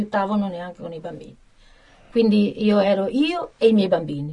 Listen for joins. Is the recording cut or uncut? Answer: uncut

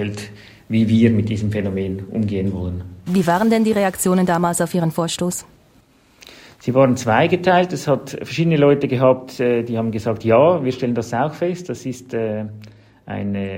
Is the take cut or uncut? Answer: uncut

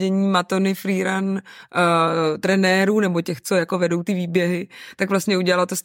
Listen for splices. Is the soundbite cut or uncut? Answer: uncut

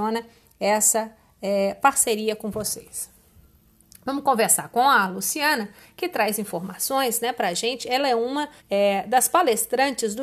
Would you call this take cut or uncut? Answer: cut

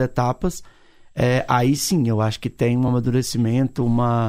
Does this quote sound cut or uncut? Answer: uncut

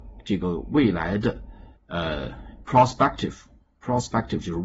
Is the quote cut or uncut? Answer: cut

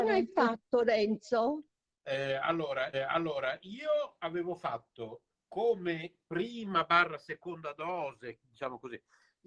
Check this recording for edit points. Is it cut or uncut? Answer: cut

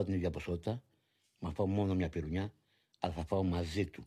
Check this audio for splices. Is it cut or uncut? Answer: uncut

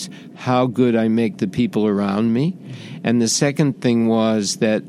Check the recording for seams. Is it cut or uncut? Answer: uncut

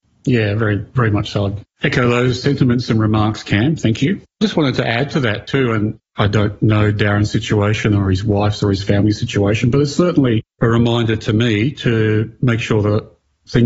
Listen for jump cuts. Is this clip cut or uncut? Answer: cut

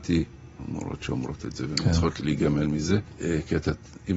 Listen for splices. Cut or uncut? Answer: cut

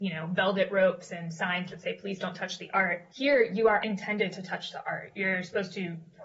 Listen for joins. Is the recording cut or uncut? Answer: cut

